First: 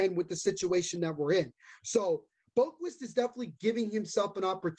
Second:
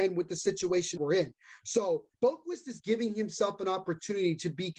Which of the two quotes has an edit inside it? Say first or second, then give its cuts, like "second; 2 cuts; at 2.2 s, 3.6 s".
second; 3 cuts; at 1.0 s, 2.1 s, 2.8 s